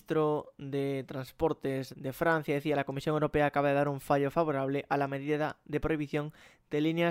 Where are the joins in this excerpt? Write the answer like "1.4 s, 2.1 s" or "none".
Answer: 1.9 s